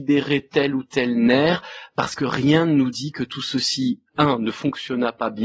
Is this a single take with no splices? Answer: yes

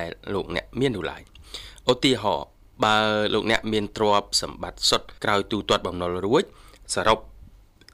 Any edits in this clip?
yes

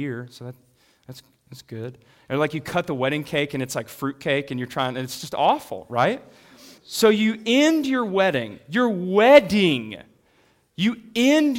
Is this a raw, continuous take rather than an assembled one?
no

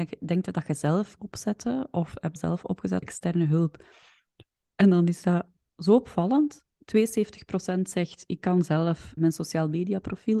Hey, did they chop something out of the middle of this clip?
yes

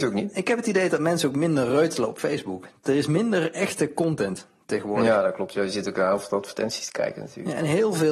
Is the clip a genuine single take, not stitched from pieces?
yes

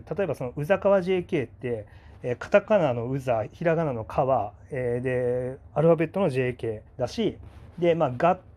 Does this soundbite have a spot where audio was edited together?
yes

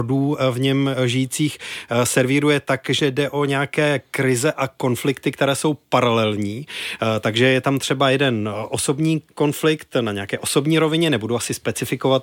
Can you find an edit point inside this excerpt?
no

